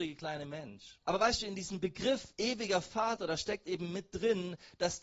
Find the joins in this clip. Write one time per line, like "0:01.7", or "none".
0:01.0